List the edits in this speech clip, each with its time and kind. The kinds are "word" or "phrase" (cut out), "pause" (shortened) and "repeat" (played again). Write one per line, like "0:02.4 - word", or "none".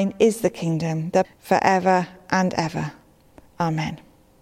0:01.2 - phrase